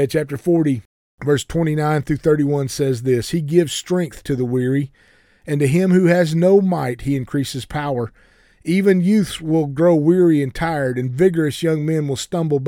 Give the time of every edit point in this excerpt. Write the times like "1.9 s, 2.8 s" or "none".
none